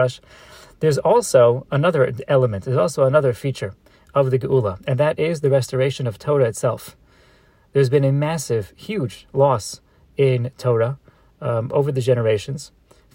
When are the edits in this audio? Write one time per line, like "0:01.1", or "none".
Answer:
none